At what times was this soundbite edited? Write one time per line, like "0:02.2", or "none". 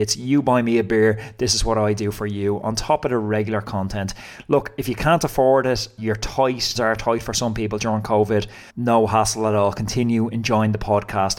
0:06.0
0:06.7
0:08.7